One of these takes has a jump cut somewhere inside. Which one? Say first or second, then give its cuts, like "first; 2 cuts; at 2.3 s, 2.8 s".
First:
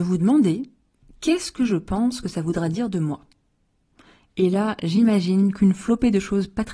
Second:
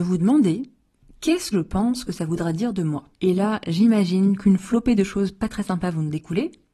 second; 2 cuts; at 1.5 s, 3.1 s